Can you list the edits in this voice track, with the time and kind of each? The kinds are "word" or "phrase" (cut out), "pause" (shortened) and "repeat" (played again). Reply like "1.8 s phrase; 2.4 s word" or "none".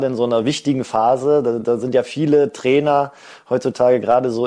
none